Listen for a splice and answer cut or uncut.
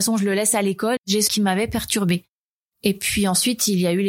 cut